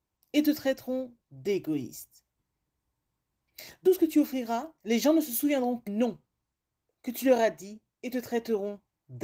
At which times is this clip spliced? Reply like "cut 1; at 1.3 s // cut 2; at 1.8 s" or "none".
cut 1; at 1.2 s // cut 2; at 3.9 s // cut 3; at 4.8 s // cut 4; at 5.9 s // cut 5; at 7.9 s